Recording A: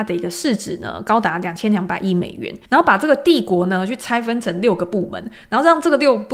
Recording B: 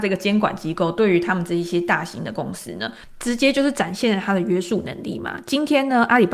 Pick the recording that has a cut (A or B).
A